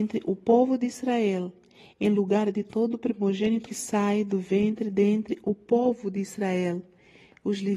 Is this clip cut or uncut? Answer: cut